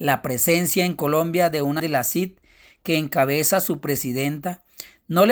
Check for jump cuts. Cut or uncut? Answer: cut